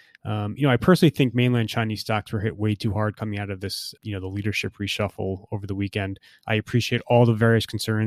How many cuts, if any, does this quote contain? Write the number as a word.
one